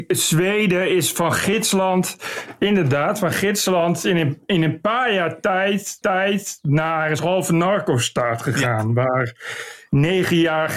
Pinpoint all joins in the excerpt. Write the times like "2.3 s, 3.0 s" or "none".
6.0 s, 7.2 s